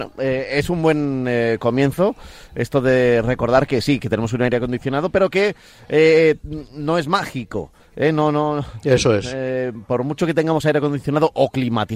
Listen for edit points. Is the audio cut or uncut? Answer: uncut